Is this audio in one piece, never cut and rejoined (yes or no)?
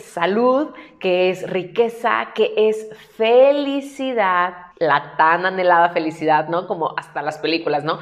no